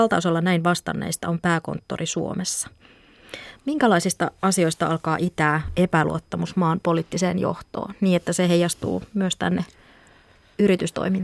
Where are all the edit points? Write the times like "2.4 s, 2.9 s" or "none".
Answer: none